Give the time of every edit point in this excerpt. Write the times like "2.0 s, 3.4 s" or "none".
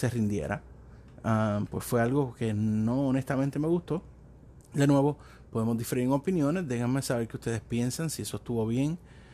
none